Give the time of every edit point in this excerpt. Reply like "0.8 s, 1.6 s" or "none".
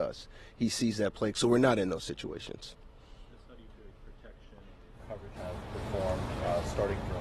1.3 s, 3.9 s, 5.4 s